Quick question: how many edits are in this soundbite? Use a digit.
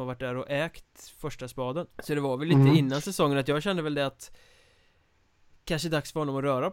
1